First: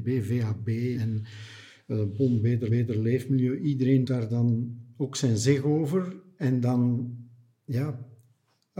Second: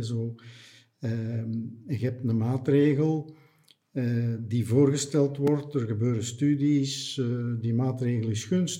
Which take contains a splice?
first; 3 cuts; at 0.9 s, 2.7 s, 4.0 s

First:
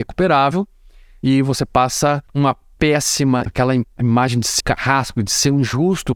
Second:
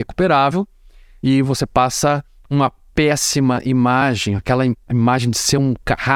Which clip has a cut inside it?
first; 3 cuts; at 2.3 s, 3.5 s, 4.6 s

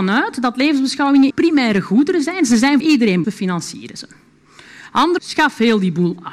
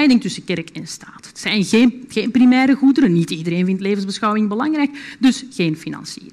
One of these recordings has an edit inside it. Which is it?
first; 4 cuts; at 1.3 s, 2.8 s, 3.2 s, 5.2 s

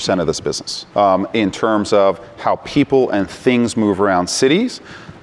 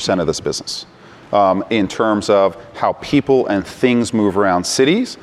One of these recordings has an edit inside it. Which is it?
first; 1 cut; at 0.9 s

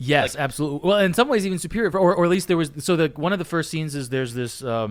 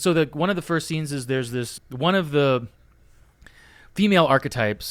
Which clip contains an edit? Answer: second; 1 cut; at 1.8 s

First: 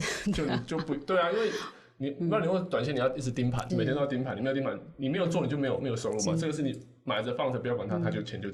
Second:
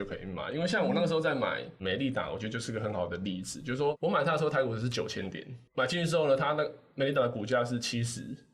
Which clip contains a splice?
first; 1 cut; at 3.7 s

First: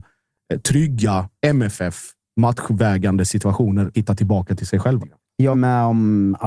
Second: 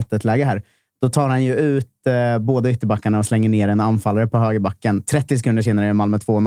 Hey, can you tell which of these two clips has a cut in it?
first; 4 cuts; at 2.2 s, 3.9 s, 5.0 s, 5.5 s

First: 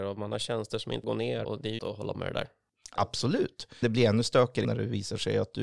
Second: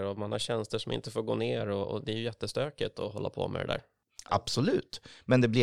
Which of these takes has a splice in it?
first; 6 cuts; at 1.0 s, 1.4 s, 1.8 s, 2.1 s, 3.8 s, 4.6 s

